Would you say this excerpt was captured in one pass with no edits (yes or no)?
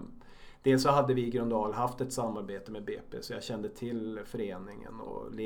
yes